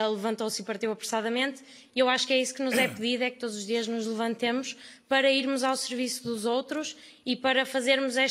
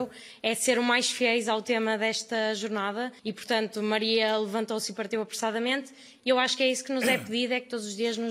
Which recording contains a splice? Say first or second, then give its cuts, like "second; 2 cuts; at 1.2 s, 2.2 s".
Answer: second; 1 cut; at 3.2 s